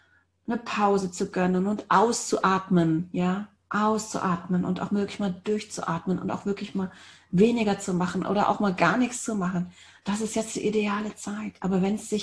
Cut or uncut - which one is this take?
uncut